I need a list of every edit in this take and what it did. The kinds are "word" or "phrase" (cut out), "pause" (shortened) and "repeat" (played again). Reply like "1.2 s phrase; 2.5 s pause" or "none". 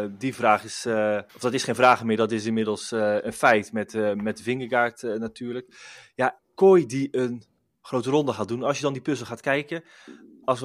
1.3 s pause; 6.4 s word; 7.6 s pause

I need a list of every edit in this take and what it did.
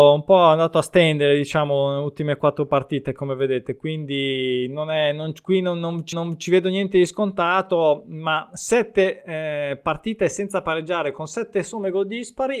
6.1 s repeat

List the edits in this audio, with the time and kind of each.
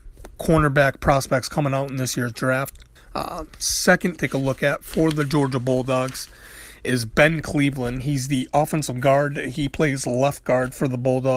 3.0 s pause; 4.2 s phrase

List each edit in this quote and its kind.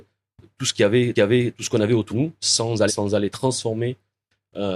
1.2 s repeat; 2.1 s word; 2.9 s word

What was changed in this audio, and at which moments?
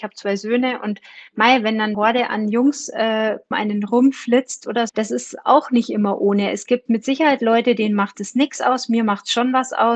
1.9 s phrase; 3.5 s word; 4.9 s word

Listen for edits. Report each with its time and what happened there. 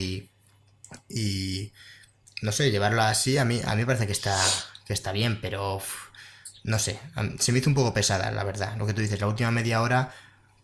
none

